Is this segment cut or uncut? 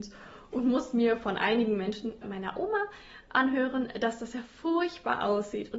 cut